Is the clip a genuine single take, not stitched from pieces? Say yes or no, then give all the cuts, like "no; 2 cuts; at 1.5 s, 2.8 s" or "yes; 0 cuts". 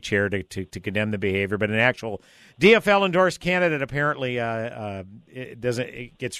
yes; 0 cuts